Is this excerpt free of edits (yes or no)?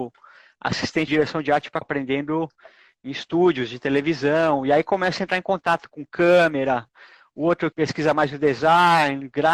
no